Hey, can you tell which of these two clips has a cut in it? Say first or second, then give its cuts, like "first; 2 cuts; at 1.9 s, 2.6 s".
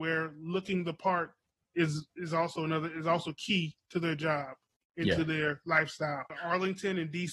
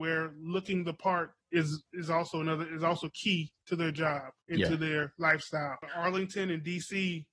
second; 2 cuts; at 1.4 s, 4.4 s